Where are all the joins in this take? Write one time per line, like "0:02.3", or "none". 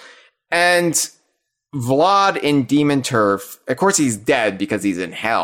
none